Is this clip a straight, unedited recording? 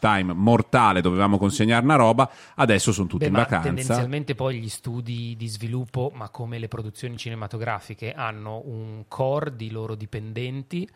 yes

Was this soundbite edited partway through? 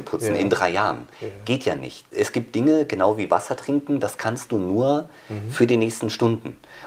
no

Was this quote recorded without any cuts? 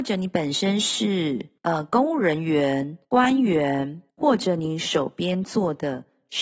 no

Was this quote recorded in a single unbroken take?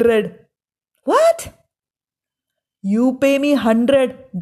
yes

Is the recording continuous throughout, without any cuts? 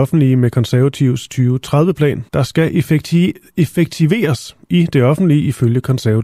no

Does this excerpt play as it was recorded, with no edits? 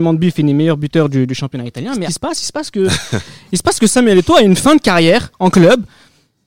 no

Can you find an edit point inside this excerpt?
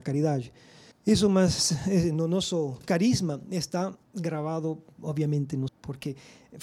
yes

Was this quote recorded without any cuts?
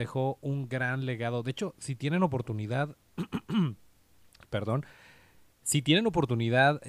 yes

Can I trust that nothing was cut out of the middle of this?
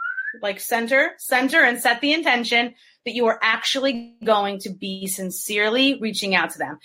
yes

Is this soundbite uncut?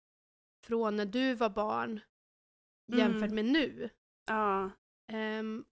yes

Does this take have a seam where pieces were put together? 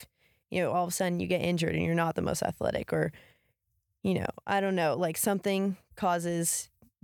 no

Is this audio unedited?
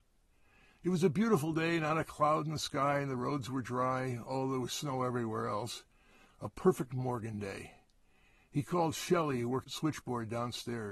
yes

